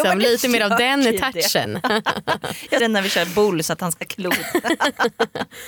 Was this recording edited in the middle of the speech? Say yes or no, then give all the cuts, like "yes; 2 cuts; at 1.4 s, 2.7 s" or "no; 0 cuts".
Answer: yes; 2 cuts; at 2.8 s, 4.0 s